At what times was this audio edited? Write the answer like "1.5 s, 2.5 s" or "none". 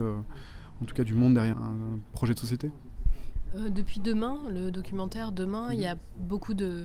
1.5 s